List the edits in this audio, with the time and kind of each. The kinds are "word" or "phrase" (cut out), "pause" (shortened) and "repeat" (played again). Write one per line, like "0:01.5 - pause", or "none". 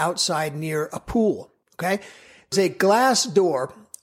0:01.6 - pause
0:02.5 - word